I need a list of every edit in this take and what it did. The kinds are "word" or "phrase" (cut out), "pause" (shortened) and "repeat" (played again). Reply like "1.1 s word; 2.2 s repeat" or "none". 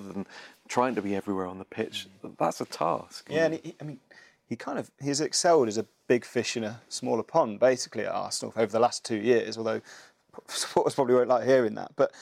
none